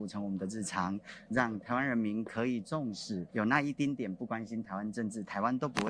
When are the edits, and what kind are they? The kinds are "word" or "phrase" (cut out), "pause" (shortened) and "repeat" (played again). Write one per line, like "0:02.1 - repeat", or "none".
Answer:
0:03.3 - pause